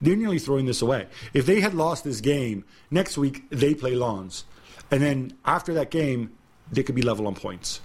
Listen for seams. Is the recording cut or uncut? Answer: uncut